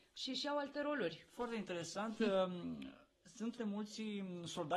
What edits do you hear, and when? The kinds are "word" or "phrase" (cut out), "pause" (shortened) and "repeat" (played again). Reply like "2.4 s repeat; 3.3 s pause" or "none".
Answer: 3.6 s word